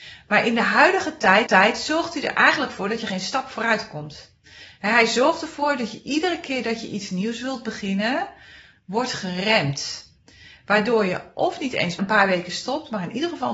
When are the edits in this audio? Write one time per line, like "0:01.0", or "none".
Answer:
0:01.5
0:12.0